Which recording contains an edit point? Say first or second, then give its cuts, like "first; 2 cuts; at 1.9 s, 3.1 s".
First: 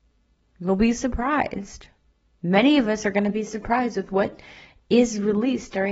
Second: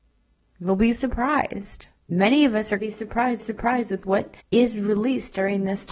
second; 4 cuts; at 2.0 s, 2.8 s, 3.4 s, 4.4 s